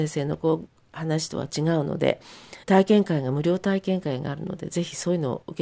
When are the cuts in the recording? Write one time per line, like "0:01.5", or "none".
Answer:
0:02.6